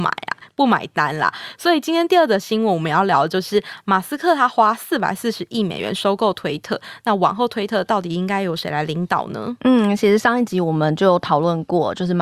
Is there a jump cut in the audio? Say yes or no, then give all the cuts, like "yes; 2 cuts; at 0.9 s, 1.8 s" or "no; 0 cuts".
no; 0 cuts